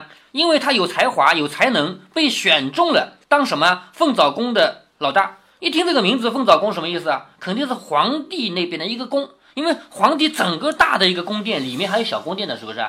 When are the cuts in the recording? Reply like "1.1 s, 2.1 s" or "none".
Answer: 3.2 s

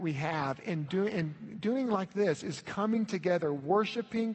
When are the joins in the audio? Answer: none

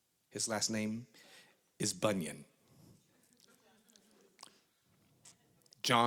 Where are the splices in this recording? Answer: none

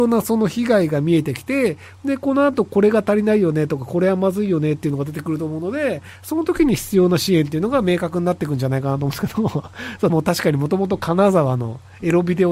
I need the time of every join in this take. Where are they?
10.1 s

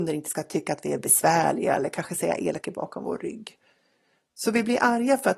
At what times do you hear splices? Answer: 2.6 s

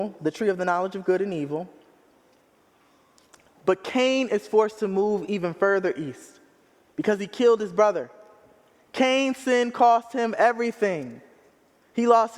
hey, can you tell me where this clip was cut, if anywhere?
none

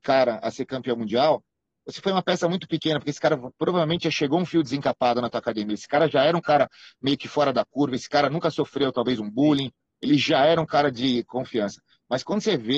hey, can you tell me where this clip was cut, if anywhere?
none

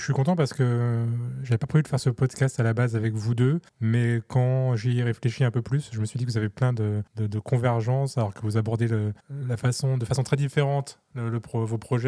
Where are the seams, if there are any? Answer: 3.7 s, 7.1 s, 9.2 s

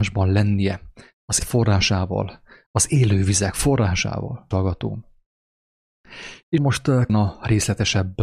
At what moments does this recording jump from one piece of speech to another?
1.4 s, 4.5 s, 6.6 s, 7.1 s

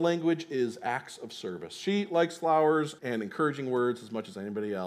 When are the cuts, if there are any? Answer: 3.0 s

